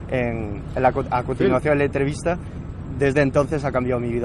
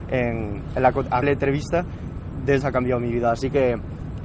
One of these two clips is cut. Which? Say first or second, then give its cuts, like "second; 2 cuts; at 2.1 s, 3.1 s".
second; 2 cuts; at 1.2 s, 2.6 s